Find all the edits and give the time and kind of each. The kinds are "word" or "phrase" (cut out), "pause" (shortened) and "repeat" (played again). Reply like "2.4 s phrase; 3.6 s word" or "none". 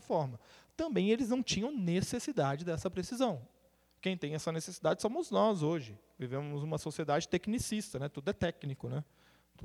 none